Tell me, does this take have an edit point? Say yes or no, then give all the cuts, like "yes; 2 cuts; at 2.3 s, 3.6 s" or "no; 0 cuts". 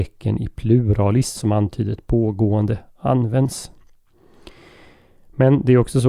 yes; 1 cut; at 1.4 s